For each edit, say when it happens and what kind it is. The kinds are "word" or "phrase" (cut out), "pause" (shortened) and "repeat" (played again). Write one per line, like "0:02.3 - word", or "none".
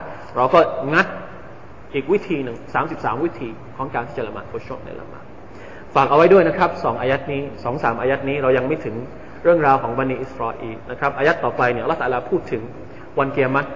none